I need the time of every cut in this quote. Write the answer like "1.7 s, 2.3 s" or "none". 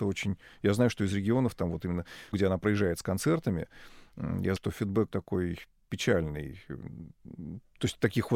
2.3 s, 4.6 s, 5.1 s